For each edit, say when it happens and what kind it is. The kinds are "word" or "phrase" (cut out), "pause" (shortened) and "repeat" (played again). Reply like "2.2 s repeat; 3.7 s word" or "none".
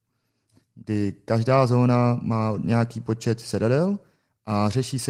none